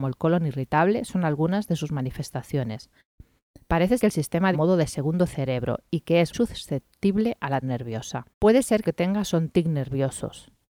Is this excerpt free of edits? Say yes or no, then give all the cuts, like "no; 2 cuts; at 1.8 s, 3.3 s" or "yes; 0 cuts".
no; 6 cuts; at 4.0 s, 4.5 s, 6.3 s, 7.6 s, 8.3 s, 8.8 s